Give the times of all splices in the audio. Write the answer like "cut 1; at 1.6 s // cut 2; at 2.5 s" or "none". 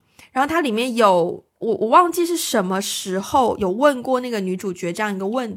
cut 1; at 1.5 s